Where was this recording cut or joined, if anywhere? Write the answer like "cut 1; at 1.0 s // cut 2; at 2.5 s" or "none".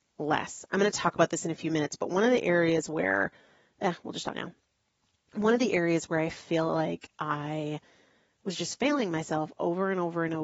cut 1; at 4.3 s